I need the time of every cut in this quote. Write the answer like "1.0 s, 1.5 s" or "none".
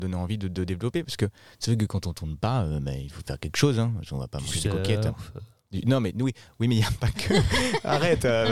none